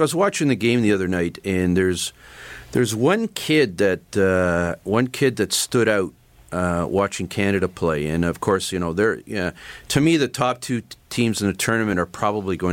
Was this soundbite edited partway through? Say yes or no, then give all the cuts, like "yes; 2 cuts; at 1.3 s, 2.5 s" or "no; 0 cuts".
no; 0 cuts